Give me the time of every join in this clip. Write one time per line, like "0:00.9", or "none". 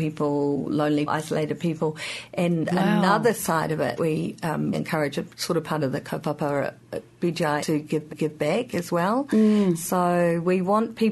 0:01.1
0:04.0
0:04.7
0:07.6
0:08.1